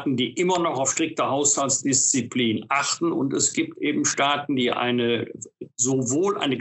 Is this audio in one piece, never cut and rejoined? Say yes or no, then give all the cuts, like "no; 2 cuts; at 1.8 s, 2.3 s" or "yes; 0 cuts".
yes; 0 cuts